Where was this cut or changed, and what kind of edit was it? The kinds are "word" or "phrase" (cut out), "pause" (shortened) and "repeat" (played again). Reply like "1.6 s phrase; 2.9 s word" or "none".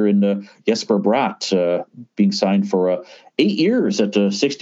none